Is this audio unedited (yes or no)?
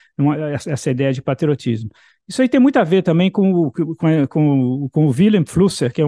yes